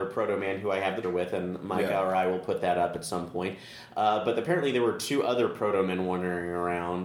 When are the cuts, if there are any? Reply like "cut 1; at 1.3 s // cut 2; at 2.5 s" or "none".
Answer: cut 1; at 1.0 s